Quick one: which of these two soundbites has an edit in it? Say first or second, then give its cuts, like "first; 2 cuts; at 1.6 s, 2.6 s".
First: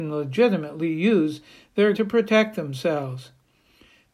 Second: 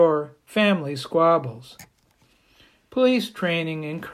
first; 1 cut; at 1.9 s